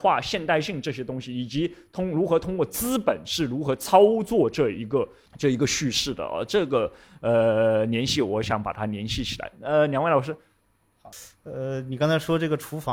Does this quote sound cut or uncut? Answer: uncut